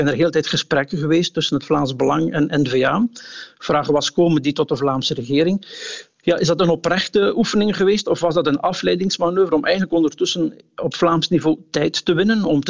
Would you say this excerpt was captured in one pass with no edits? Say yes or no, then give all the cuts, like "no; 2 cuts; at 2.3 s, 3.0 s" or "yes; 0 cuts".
yes; 0 cuts